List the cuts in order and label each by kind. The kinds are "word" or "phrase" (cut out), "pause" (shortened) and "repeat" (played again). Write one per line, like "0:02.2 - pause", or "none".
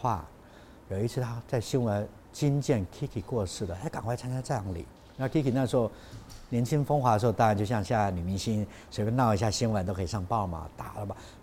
0:05.0 - pause